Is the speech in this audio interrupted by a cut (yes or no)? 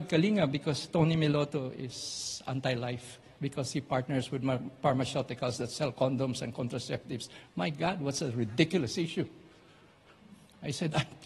no